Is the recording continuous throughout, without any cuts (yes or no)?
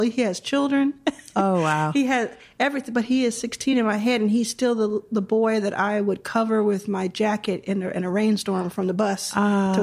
yes